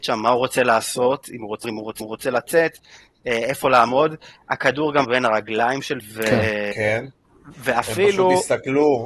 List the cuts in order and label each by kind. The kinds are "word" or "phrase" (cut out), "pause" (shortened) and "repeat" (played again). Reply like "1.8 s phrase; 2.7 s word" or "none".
1.6 s word; 2.0 s repeat; 5.0 s word; 6.0 s word